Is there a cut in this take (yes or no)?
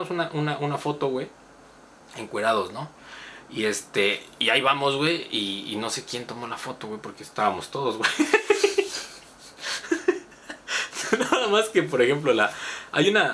no